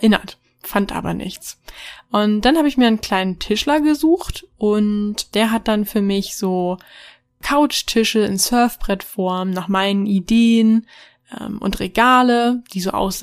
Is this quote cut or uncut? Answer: uncut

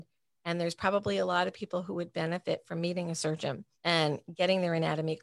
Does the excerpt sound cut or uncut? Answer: cut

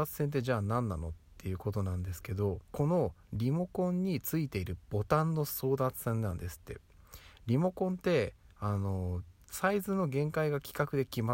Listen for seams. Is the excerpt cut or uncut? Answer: cut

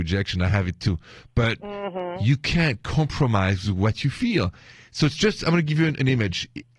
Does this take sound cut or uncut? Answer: uncut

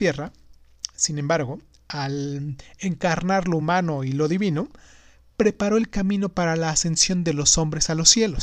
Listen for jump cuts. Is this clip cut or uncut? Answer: uncut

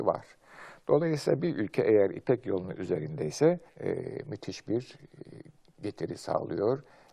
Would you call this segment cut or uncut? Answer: cut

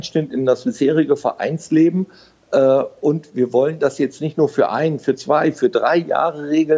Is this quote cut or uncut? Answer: uncut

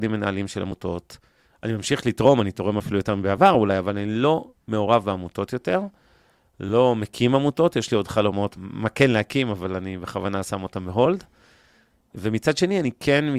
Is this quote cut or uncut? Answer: cut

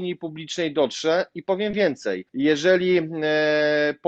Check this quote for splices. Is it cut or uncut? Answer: cut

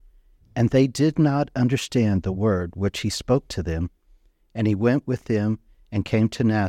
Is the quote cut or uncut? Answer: uncut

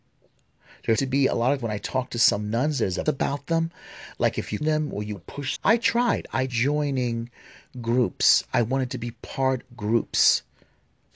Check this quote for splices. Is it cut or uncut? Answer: cut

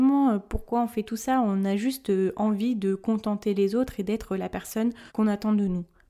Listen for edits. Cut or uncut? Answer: cut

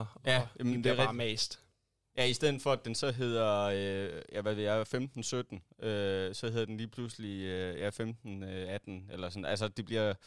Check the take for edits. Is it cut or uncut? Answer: uncut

